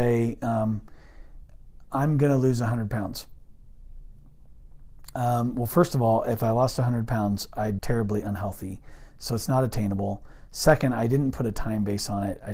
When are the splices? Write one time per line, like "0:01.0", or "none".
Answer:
0:07.8